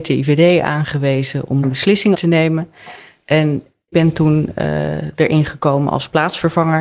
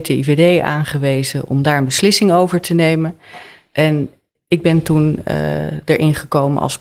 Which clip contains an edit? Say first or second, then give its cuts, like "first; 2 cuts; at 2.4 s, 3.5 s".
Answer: first; 3 cuts; at 1.6 s, 2.1 s, 3.9 s